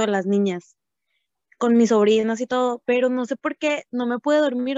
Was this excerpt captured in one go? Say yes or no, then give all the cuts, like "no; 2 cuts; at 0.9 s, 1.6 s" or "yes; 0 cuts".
yes; 0 cuts